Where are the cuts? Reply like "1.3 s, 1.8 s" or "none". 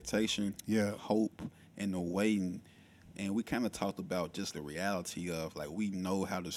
1.6 s, 4.5 s